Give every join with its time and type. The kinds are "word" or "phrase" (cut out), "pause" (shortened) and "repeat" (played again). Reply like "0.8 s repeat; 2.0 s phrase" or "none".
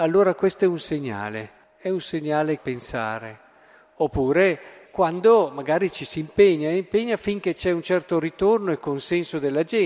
1.6 s pause; 2.6 s phrase; 4.9 s word